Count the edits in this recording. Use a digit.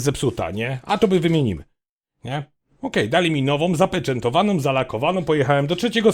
0